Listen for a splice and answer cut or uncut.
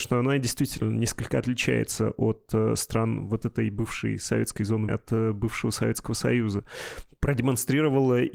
cut